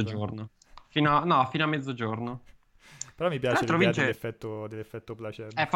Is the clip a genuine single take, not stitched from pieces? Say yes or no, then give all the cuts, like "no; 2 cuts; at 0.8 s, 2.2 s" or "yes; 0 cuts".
yes; 0 cuts